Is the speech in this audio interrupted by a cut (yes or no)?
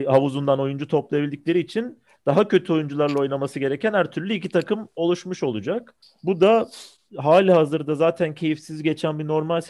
no